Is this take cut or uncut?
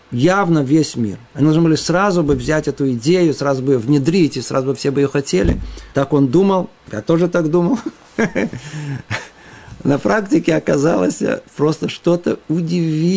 cut